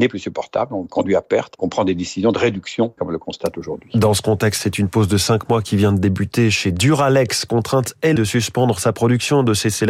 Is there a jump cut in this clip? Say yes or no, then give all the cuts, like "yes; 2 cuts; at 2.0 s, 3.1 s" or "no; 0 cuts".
yes; 3 cuts; at 1.6 s, 3.0 s, 8.2 s